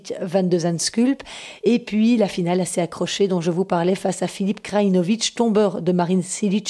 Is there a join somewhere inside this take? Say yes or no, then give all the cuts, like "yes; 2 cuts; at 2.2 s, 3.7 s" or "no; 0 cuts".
no; 0 cuts